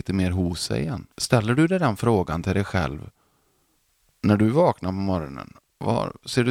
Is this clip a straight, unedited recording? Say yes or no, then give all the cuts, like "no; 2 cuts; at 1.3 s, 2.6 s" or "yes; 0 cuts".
no; 1 cut; at 1.1 s